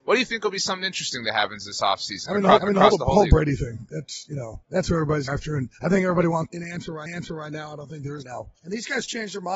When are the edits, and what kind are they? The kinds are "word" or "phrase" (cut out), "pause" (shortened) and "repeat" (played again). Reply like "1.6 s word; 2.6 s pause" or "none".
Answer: 2.6 s repeat; 4.6 s pause; 5.3 s phrase; 5.7 s pause; 6.5 s word; 7.1 s repeat; 8.2 s phrase; 8.6 s pause